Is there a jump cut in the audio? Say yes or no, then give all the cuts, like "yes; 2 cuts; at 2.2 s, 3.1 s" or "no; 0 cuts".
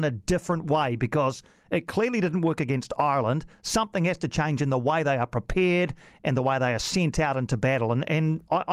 no; 0 cuts